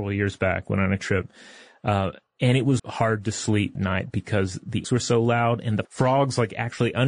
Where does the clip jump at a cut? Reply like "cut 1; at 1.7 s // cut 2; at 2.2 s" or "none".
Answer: cut 1; at 1.0 s // cut 2; at 2.8 s // cut 3; at 3.8 s // cut 4; at 4.8 s // cut 5; at 5.8 s